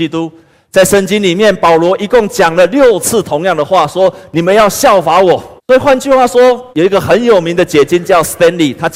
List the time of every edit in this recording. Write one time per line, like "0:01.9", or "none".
0:05.6
0:06.7